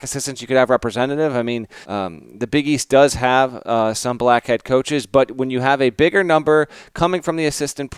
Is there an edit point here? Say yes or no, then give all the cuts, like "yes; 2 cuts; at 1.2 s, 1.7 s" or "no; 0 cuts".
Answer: yes; 1 cut; at 1.8 s